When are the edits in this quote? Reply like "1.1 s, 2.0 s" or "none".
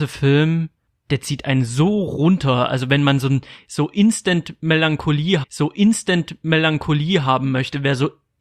5.4 s